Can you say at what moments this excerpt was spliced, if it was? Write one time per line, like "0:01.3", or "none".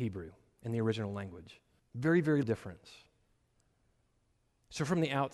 0:01.8
0:02.4